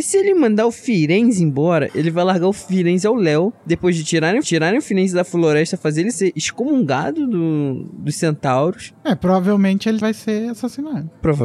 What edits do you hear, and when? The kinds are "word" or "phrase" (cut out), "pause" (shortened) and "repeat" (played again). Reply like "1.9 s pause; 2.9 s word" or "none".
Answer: 4.4 s repeat; 10.0 s word